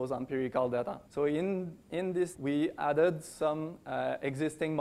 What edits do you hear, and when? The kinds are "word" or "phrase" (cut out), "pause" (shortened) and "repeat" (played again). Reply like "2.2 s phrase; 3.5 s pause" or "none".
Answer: 1.1 s pause; 1.8 s pause; 2.3 s word